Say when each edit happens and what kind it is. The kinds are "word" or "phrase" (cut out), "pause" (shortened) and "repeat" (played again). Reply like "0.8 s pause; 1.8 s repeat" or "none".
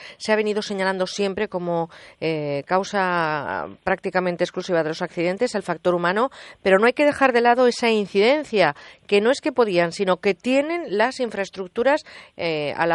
none